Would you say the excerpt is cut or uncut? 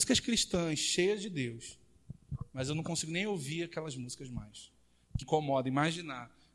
cut